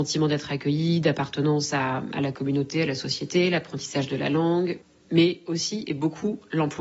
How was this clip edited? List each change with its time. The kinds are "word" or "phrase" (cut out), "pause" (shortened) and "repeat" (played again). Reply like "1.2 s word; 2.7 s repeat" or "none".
none